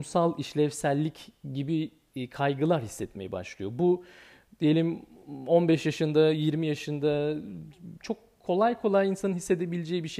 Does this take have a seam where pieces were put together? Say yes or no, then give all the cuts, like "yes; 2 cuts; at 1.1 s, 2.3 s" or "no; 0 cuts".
no; 0 cuts